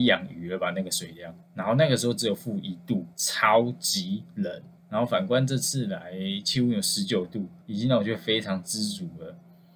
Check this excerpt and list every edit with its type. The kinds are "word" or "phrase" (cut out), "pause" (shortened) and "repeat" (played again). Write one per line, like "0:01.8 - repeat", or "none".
0:01.4 - pause
0:03.1 - pause
0:04.8 - pause
0:07.6 - pause